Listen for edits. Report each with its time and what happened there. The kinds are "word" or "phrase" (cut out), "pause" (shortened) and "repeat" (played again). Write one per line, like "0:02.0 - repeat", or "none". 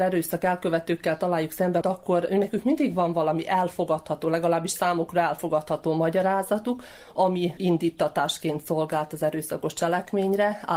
0:01.8 - word